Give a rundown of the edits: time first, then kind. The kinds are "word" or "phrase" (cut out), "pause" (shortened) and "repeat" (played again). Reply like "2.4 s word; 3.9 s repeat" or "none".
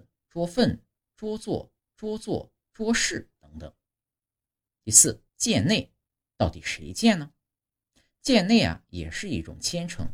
1.8 s repeat; 5.3 s pause